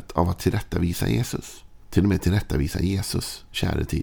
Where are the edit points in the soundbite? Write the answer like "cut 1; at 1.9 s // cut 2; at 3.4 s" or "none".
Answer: cut 1; at 1.8 s